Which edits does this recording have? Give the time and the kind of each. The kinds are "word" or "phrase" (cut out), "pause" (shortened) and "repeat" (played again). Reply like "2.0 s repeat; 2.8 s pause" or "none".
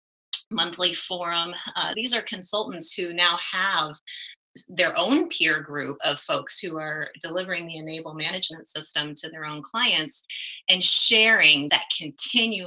1.9 s word; 6.0 s word; 11.7 s word